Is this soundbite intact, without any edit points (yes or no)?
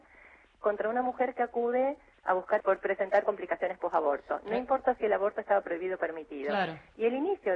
no